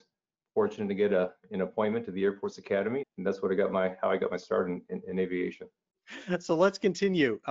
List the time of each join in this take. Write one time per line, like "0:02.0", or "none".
0:03.0

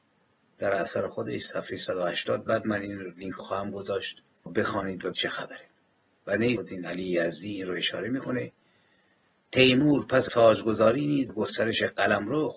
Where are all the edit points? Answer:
0:03.4
0:04.5
0:05.1
0:06.6
0:10.3
0:11.3

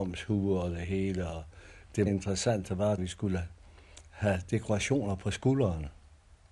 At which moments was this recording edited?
0:02.1
0:03.0

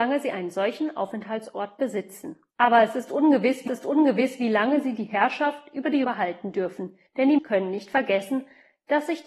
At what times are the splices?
0:02.5
0:03.7
0:06.0
0:07.1
0:07.4

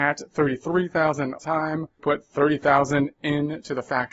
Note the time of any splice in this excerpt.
0:01.4
0:02.0

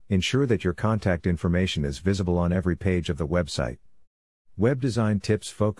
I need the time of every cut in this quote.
none

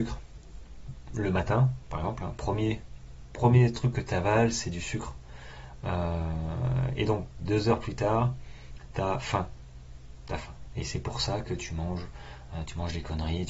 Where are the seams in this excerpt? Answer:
none

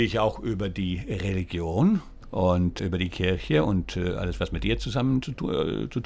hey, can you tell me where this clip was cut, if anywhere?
none

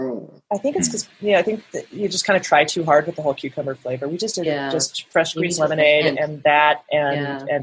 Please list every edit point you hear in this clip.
none

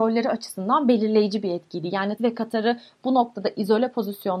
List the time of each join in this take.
0:02.2

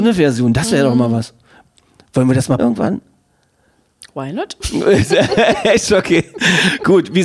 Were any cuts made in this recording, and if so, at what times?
0:02.6

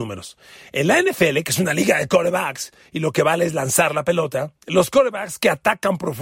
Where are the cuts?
0:04.6

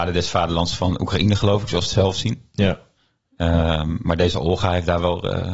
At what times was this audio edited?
0:01.9

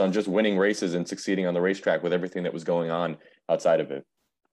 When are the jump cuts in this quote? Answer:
none

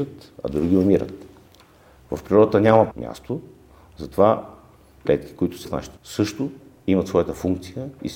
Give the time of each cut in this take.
0:02.9
0:05.0
0:05.6
0:06.0

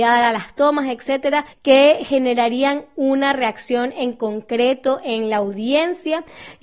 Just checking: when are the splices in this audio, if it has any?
0:01.5

